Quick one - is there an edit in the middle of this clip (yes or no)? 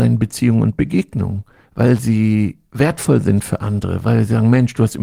no